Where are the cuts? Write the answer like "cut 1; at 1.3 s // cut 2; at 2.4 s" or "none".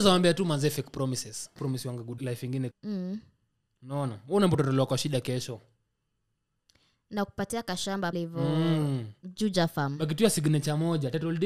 cut 1; at 1.6 s // cut 2; at 2.2 s // cut 3; at 2.7 s // cut 4; at 8.1 s